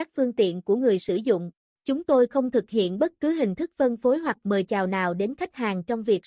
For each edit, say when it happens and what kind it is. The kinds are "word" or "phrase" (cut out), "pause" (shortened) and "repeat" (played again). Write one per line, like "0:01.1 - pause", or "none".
0:01.6 - pause